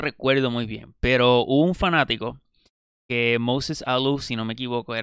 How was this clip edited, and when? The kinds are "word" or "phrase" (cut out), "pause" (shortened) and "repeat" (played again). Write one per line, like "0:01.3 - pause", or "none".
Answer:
none